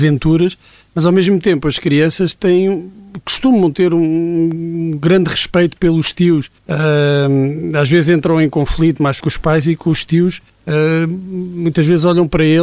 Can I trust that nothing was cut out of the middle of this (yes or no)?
no